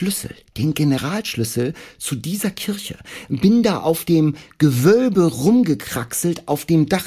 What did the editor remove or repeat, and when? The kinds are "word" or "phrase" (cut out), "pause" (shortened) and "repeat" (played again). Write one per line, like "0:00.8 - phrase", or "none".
none